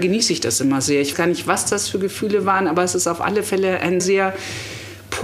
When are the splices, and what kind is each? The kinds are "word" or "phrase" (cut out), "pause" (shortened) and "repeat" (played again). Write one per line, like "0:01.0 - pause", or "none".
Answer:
0:01.1 - word
0:04.0 - word